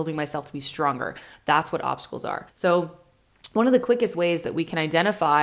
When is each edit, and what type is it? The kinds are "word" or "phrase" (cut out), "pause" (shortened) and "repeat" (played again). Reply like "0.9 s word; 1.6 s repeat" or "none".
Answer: 2.5 s pause